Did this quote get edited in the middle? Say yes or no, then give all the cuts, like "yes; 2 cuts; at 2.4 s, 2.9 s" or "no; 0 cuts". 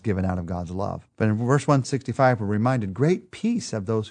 yes; 1 cut; at 1.1 s